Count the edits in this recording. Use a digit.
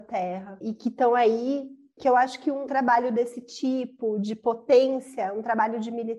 0